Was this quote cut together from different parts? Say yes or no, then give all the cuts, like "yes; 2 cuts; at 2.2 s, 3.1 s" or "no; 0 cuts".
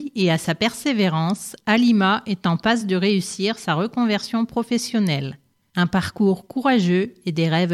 no; 0 cuts